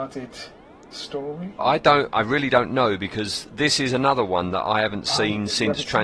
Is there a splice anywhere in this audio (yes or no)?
yes